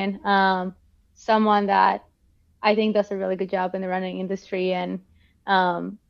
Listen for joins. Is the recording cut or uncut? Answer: uncut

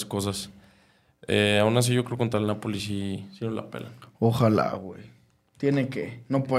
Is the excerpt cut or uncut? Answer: uncut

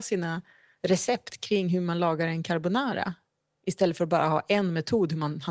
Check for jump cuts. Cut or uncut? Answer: uncut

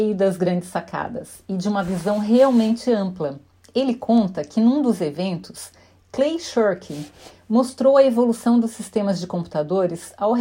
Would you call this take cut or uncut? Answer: uncut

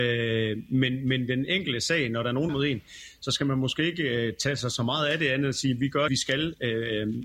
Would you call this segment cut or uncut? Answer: cut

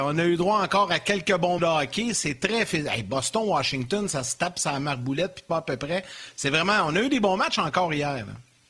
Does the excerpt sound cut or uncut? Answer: cut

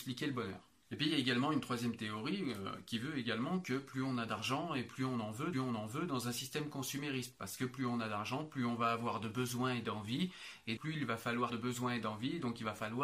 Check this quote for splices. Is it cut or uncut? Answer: cut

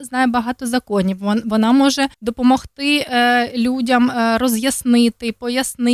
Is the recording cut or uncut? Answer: cut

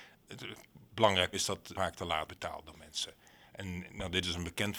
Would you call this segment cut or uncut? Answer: cut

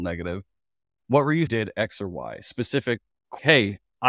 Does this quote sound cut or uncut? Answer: cut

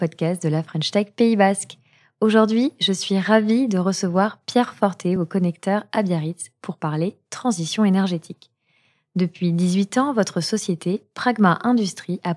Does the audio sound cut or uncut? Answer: uncut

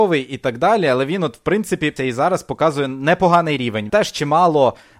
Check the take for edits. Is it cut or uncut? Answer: cut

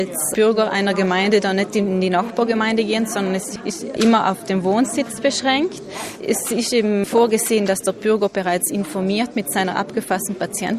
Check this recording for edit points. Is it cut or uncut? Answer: uncut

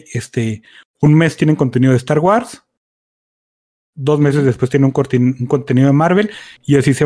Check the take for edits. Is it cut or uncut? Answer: uncut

